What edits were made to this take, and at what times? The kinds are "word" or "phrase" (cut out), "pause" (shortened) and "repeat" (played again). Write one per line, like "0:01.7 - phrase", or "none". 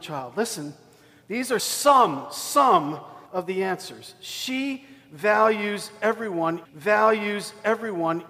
0:01.6 - word
0:03.3 - pause
0:06.6 - repeat